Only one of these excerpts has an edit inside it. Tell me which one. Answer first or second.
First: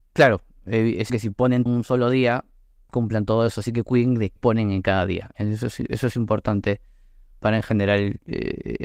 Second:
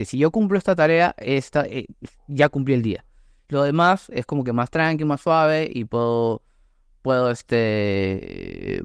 first